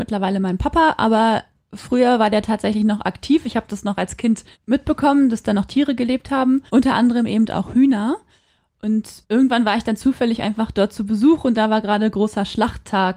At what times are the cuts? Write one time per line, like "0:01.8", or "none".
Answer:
0:04.5
0:06.7
0:09.2